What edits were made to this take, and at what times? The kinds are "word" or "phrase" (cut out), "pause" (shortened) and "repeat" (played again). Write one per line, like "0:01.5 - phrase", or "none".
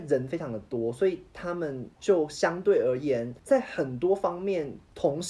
0:01.9 - pause
0:03.4 - pause